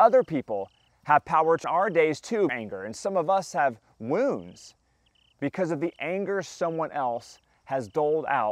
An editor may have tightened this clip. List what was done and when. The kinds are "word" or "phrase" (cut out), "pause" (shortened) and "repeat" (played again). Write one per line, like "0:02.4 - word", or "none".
0:01.6 - word
0:02.5 - phrase